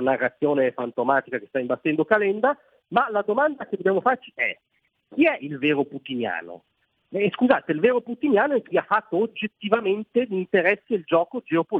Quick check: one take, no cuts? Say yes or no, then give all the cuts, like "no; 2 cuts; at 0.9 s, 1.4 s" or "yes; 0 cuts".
yes; 0 cuts